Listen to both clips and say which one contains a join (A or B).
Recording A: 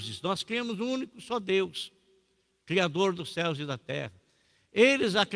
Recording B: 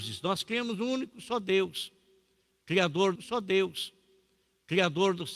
B